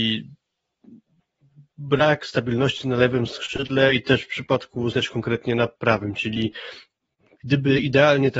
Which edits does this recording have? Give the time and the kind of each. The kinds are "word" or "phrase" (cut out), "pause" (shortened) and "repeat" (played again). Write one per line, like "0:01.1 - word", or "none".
0:04.9 - word

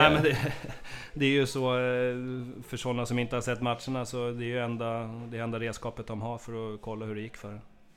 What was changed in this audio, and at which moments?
none

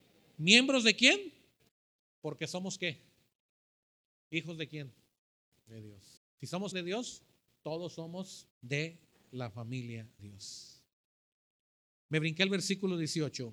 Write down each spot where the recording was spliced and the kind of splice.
0:01.7 - pause
0:06.2 - pause
0:06.7 - word
0:08.5 - word
0:10.2 - word

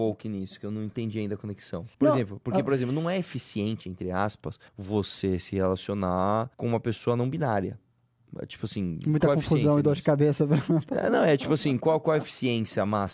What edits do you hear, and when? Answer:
0:01.9 - pause
0:04.7 - pause
0:06.5 - pause

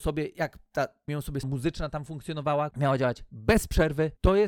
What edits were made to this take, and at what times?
0:01.1 - word
0:01.4 - word
0:02.7 - word

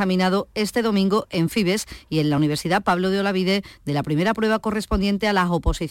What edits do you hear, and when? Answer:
none

